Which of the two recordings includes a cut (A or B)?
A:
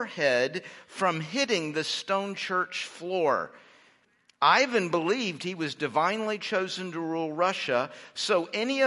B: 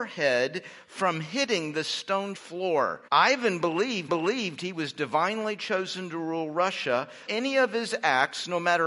B